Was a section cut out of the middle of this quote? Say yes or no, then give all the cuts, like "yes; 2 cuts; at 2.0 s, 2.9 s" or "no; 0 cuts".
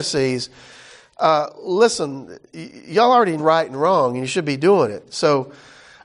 yes; 1 cut; at 3.4 s